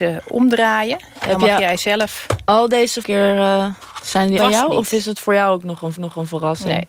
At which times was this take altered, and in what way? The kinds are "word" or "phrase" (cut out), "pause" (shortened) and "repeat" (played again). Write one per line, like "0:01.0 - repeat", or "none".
0:03.0 - phrase
0:04.4 - phrase
0:06.0 - repeat